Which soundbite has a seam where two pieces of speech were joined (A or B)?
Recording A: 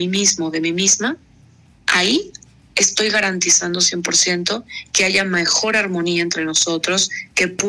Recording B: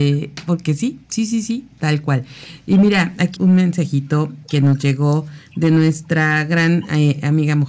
B